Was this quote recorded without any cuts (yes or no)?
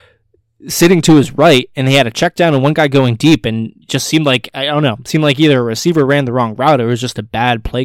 no